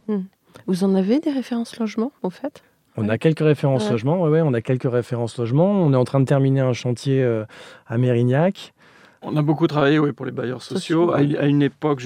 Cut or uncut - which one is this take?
uncut